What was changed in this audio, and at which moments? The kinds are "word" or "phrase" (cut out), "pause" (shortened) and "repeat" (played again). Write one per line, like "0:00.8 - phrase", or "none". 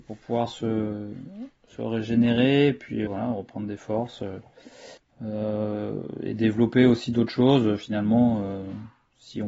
0:03.1 - word
0:05.0 - pause